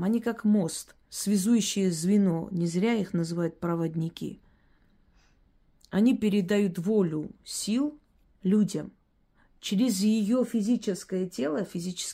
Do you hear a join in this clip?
yes; 2 cuts; at 1.1 s, 8.2 s

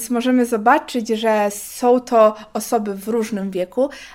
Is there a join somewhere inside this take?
no; 0 cuts

